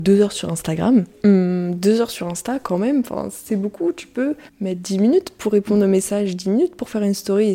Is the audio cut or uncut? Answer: uncut